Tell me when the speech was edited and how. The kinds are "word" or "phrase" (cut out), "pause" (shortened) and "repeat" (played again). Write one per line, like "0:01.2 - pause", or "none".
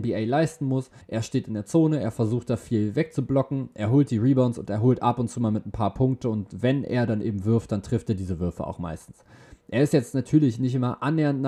0:01.0 - pause